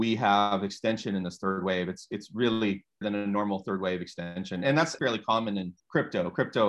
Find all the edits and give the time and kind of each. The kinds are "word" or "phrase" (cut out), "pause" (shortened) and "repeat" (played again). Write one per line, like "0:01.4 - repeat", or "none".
0:03.0 - word
0:05.0 - word
0:05.8 - pause

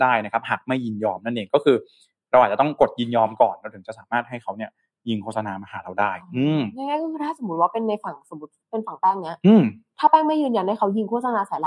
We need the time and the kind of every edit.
none

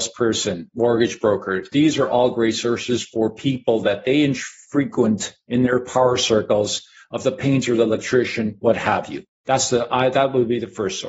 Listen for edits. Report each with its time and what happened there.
none

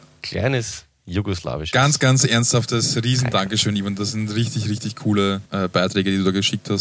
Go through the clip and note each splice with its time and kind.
0:05.5 - pause

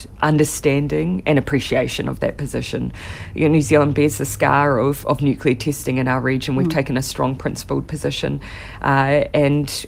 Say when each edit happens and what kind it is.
none

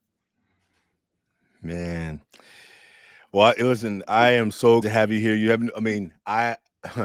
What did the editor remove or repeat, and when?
0:04.8 - word

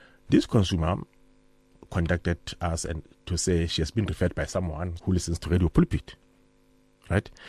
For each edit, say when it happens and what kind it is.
0:05.0 - word

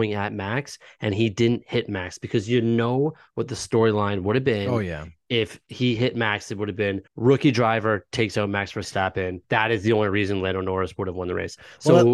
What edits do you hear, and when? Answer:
0:07.1 - pause
0:09.4 - pause

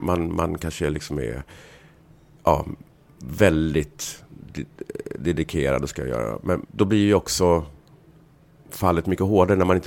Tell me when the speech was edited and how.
0:05.9 - phrase
0:06.6 - word

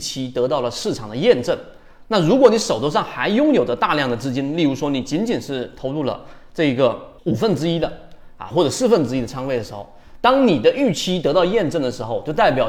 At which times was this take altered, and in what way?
0:07.2 - pause

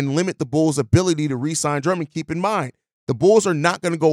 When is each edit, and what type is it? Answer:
none

